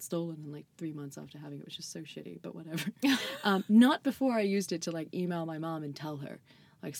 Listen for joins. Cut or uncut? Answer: uncut